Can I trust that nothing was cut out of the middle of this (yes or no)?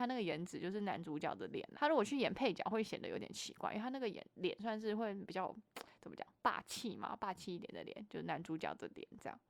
no